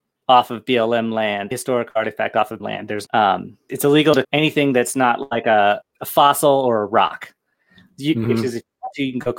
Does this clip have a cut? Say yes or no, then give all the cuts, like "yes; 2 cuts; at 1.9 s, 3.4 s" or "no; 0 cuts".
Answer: yes; 6 cuts; at 1.5 s, 2.6 s, 3.1 s, 3.7 s, 4.2 s, 5.8 s